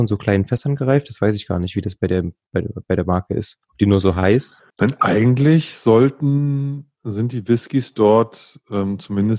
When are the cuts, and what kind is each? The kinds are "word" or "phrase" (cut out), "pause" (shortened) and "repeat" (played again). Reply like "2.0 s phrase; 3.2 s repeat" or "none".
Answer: 3.6 s pause; 4.7 s pause